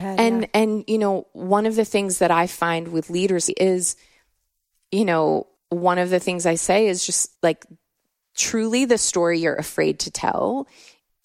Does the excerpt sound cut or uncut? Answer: cut